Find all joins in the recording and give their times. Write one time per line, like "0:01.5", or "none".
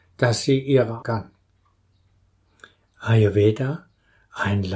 0:01.0

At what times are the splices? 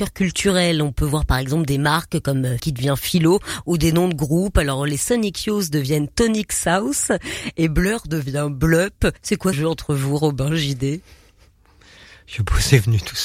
0:02.6
0:09.2
0:09.5

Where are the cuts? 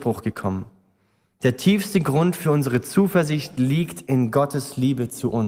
none

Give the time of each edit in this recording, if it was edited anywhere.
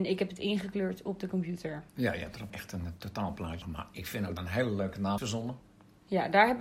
0:02.5
0:03.6
0:04.4
0:05.2

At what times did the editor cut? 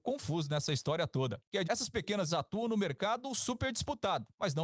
0:01.6
0:02.3

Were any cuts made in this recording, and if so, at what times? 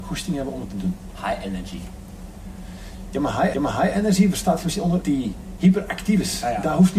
0:03.5
0:05.0

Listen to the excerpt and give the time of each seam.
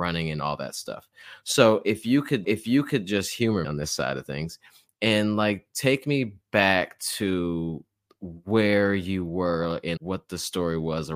0:02.4
0:03.6
0:06.4
0:08.0
0:10.0

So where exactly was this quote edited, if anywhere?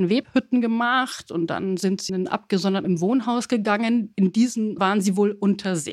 0:02.1
0:02.8
0:04.8

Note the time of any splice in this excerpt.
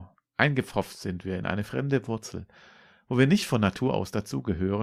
none

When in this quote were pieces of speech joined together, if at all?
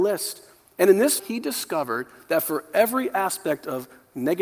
0:01.2

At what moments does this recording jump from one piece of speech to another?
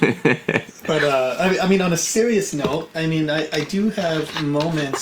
none

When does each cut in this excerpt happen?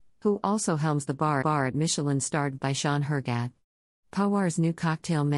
0:01.4
0:02.6

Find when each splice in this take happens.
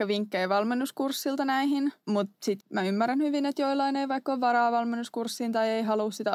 0:02.0
0:02.6

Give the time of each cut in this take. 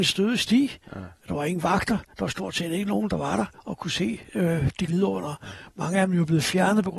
0:03.5
0:04.9

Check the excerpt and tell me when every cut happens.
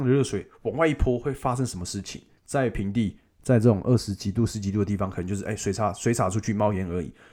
0:02.4

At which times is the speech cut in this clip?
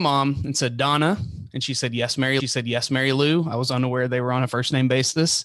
0:02.4

